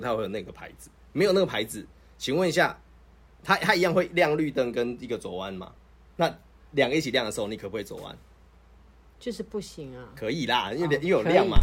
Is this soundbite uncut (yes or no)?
yes